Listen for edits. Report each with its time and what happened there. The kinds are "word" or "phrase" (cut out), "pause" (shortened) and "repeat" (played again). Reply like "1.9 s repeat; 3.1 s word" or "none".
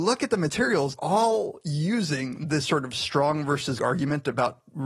1.0 s word; 2.6 s word; 3.8 s word